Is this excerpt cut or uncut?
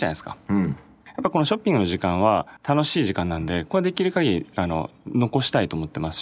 cut